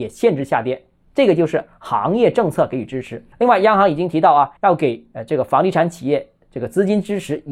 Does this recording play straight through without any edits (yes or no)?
no